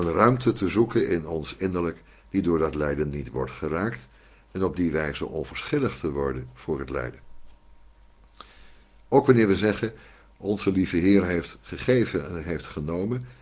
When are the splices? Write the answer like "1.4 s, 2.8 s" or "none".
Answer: none